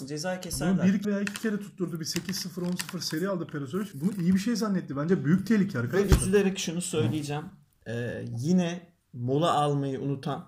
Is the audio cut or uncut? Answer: cut